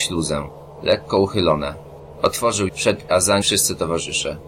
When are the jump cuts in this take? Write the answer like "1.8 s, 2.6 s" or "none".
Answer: 2.7 s, 3.1 s, 3.4 s

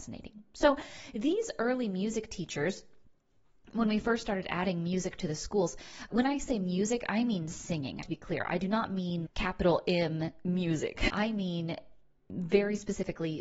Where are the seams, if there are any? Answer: 6.1 s, 8.0 s, 9.2 s, 11.1 s

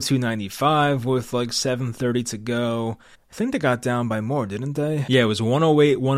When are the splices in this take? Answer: 3.1 s

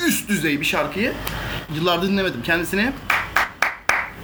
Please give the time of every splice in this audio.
1.7 s

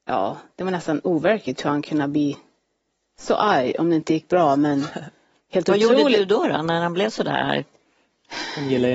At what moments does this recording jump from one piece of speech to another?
none

